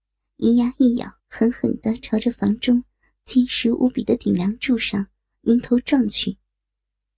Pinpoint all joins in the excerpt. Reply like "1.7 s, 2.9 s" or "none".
1.2 s